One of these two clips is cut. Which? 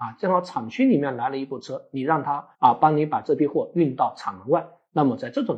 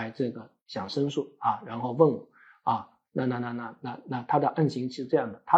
first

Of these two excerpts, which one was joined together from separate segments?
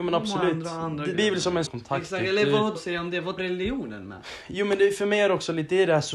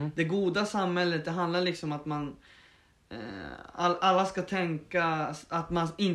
first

